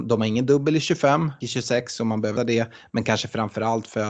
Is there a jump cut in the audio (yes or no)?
yes